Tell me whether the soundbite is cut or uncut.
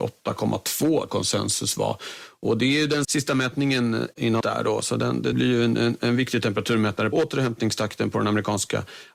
cut